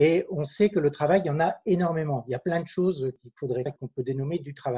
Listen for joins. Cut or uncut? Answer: cut